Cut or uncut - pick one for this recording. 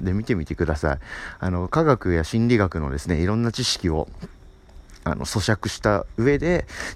uncut